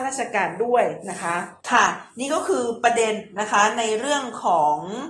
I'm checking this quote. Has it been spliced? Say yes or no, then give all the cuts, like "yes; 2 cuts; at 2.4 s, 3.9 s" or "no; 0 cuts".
yes; 1 cut; at 1.6 s